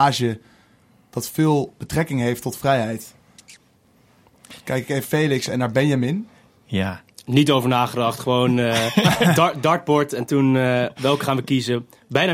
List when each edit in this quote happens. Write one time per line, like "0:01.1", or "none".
0:05.0
0:07.2